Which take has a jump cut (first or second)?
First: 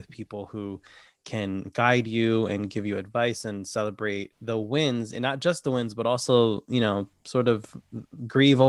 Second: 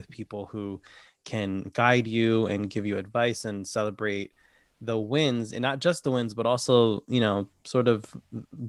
first